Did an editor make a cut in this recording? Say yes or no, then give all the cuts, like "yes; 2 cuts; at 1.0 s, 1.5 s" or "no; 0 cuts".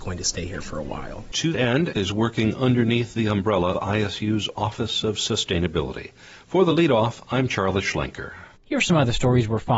yes; 3 cuts; at 1.5 s, 1.9 s, 3.7 s